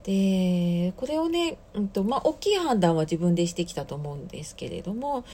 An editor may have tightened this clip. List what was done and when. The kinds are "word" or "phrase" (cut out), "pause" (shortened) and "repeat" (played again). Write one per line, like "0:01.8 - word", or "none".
0:01.7 - pause